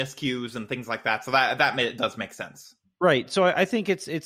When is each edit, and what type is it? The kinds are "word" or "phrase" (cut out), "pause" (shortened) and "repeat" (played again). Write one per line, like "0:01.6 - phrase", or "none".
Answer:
none